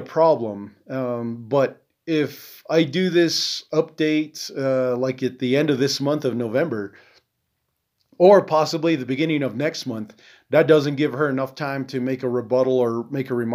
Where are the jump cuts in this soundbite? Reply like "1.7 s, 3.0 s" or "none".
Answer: none